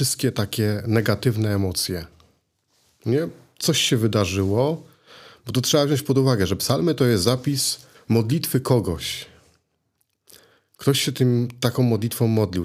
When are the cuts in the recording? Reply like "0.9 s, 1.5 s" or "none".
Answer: 7.9 s